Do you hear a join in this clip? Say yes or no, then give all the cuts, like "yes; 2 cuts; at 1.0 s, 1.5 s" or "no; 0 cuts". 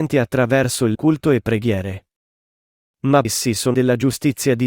yes; 3 cuts; at 0.9 s, 3.2 s, 3.7 s